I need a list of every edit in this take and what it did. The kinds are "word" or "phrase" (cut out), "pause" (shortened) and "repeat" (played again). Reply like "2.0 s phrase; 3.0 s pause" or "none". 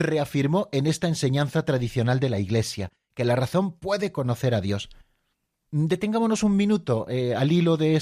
none